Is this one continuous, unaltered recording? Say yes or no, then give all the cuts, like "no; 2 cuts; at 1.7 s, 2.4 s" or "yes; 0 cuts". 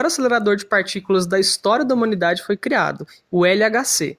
yes; 0 cuts